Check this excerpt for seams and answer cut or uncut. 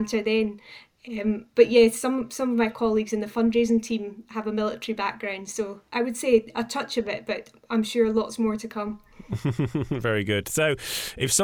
uncut